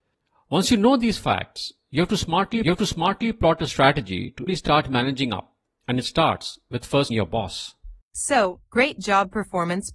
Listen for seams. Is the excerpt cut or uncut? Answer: cut